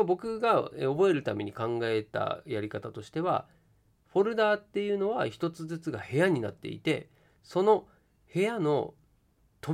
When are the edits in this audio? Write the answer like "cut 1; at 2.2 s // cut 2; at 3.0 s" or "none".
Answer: none

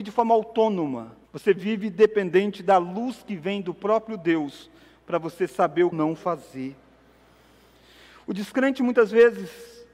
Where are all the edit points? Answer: cut 1; at 1.2 s // cut 2; at 5.9 s

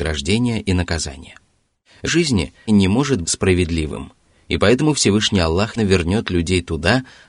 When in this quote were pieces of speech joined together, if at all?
cut 1; at 2.1 s // cut 2; at 2.7 s // cut 3; at 3.2 s // cut 4; at 5.8 s

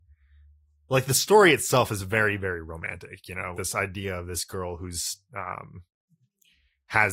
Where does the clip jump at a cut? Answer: cut 1; at 3.5 s

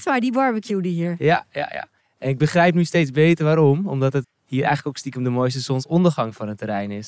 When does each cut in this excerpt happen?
cut 1; at 4.2 s

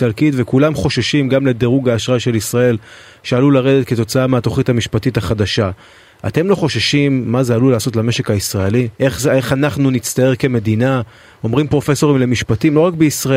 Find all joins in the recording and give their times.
cut 1; at 8.9 s

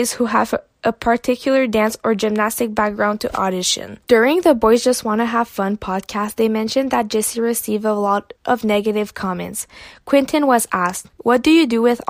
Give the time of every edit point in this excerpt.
cut 1; at 4.0 s // cut 2; at 8.4 s

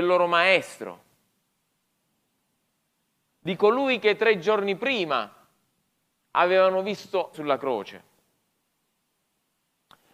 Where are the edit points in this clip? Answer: cut 1; at 7.3 s

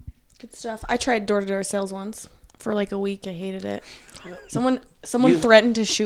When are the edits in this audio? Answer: none

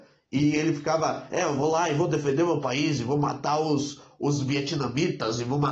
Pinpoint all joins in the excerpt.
none

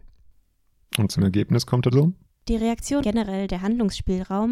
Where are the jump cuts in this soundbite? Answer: cut 1; at 1.1 s // cut 2; at 1.9 s // cut 3; at 2.2 s // cut 4; at 3.0 s

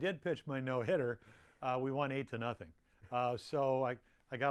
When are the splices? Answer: none

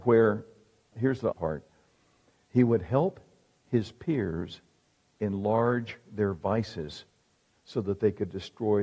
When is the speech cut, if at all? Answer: cut 1; at 0.9 s // cut 2; at 1.3 s

